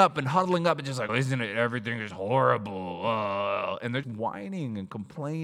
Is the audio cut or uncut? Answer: cut